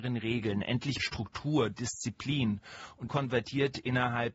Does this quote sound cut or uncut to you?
cut